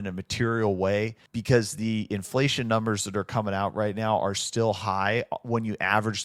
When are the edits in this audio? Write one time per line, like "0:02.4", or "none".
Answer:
0:01.3